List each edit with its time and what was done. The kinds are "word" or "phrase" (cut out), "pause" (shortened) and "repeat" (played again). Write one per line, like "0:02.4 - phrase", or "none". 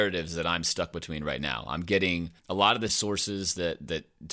0:02.4 - pause
0:02.9 - word

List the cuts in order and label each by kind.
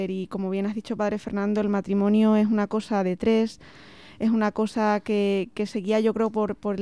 none

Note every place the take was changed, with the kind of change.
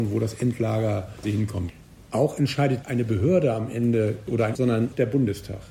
0:01.2 - word
0:02.8 - word
0:04.5 - word

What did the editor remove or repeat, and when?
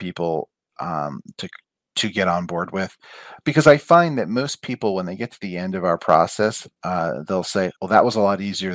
0:01.6 - pause
0:06.7 - pause
0:07.8 - pause

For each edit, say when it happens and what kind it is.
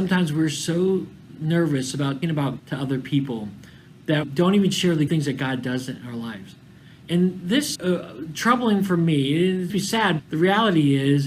0:02.2 - word
0:02.6 - word
0:04.2 - word
0:05.1 - word
0:07.8 - word
0:09.7 - word
0:10.2 - word

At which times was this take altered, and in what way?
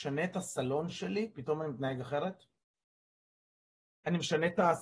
none

